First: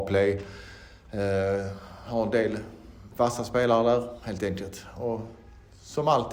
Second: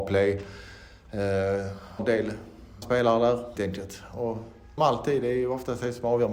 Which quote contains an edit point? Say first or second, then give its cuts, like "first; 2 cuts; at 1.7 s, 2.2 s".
second; 4 cuts; at 2.0 s, 2.8 s, 3.6 s, 4.8 s